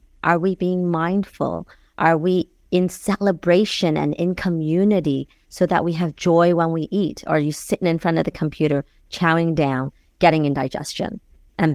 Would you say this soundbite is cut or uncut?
uncut